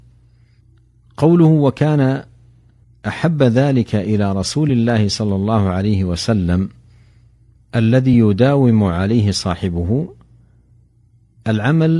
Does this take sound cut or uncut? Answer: uncut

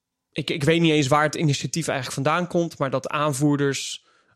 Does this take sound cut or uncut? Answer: uncut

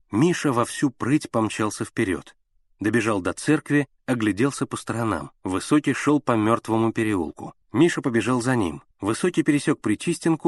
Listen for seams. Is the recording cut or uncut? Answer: cut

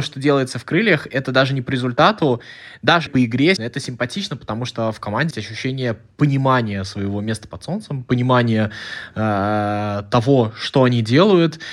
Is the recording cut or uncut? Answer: cut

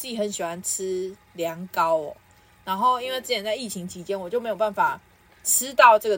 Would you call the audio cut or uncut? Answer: uncut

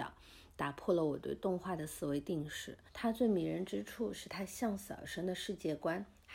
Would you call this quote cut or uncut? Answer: cut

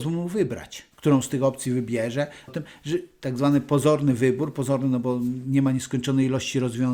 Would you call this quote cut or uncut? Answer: cut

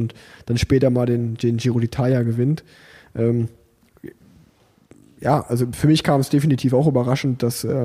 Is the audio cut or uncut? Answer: uncut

